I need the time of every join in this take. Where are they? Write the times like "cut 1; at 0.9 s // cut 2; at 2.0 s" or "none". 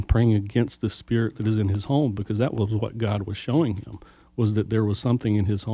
none